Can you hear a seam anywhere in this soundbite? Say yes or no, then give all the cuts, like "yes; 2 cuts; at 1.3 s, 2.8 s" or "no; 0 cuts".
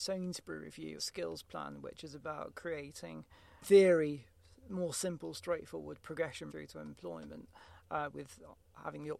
yes; 3 cuts; at 1.0 s, 3.6 s, 6.5 s